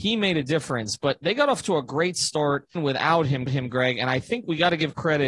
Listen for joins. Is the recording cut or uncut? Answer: cut